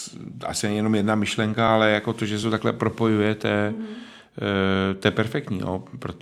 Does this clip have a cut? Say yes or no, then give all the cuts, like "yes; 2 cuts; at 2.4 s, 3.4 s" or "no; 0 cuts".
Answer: no; 0 cuts